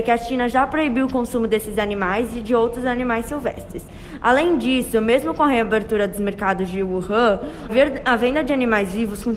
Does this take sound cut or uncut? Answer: cut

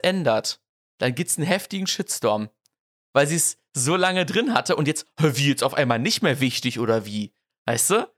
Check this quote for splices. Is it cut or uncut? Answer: uncut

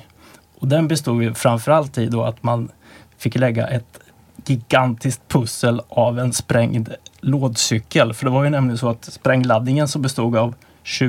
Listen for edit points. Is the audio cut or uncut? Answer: uncut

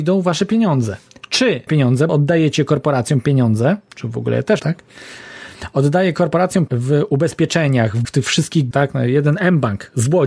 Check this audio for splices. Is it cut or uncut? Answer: cut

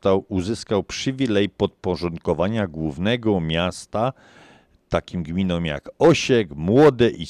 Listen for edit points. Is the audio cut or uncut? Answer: uncut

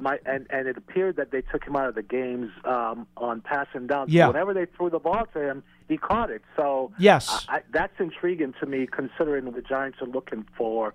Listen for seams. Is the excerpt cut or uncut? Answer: cut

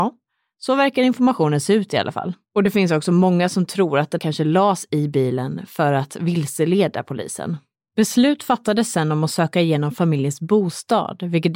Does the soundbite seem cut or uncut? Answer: cut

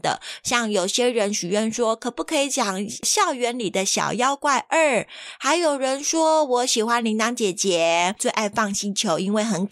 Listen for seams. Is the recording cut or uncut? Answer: uncut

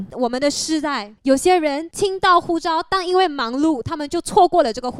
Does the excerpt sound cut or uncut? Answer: cut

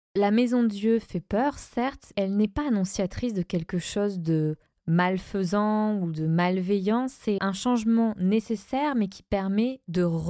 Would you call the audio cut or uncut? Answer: cut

